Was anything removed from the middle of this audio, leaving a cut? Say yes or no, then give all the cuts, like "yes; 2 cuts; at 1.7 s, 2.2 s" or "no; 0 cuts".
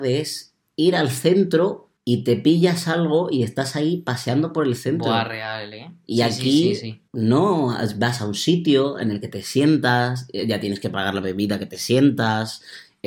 yes; 2 cuts; at 2.0 s, 7.1 s